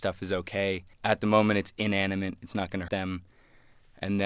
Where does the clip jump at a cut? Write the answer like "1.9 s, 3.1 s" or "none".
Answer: 0.9 s, 2.9 s